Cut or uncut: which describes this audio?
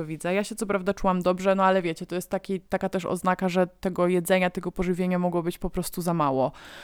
cut